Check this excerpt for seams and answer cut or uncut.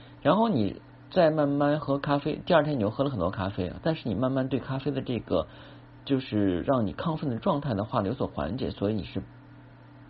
cut